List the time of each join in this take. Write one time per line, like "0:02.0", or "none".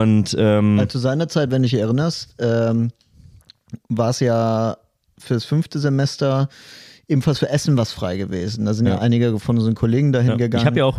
none